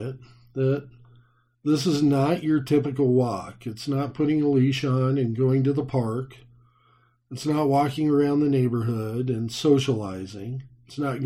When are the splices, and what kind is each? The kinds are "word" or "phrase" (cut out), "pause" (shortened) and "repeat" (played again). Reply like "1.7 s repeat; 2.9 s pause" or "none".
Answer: none